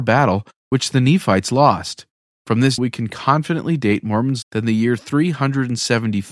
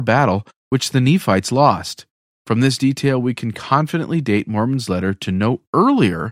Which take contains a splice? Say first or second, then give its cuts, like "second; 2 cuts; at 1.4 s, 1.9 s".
first; 2 cuts; at 2.8 s, 4.4 s